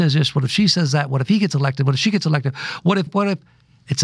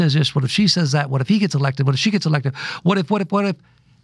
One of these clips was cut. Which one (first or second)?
first